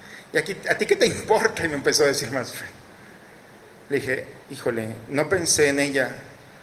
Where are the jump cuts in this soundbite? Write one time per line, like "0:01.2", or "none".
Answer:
0:04.4